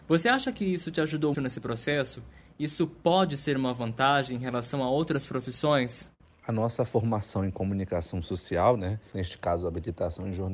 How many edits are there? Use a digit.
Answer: 1